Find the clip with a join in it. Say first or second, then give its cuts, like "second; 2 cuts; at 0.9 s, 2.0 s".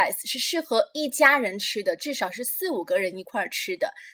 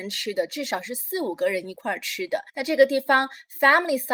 second; 1 cut; at 2.5 s